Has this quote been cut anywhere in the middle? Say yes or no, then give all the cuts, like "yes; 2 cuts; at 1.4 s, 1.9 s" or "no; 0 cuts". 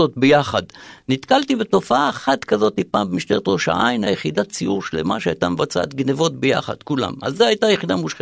yes; 1 cut; at 4.1 s